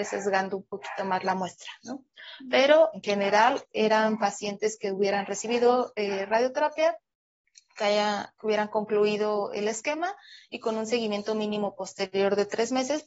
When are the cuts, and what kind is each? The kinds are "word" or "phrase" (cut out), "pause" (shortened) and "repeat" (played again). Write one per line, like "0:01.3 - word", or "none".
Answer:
0:02.9 - word